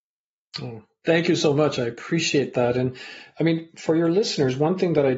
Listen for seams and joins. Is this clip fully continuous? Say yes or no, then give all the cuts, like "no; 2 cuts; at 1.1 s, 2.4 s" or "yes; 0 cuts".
yes; 0 cuts